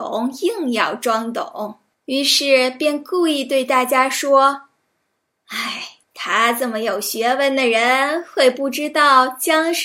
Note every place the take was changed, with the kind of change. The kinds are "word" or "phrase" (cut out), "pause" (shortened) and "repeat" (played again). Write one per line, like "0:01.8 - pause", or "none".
0:01.9 - pause
0:06.0 - pause